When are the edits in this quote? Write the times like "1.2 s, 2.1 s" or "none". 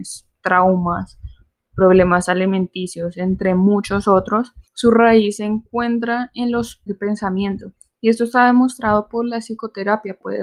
4.6 s, 6.9 s